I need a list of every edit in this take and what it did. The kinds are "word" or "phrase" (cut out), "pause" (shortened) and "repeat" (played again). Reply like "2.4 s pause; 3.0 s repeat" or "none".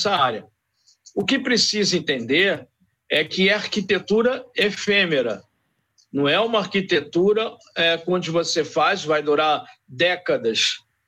none